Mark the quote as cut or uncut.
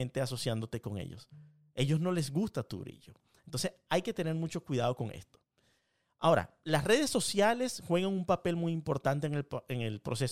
uncut